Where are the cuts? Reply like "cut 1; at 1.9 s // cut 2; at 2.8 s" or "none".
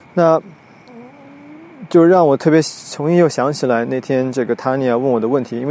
none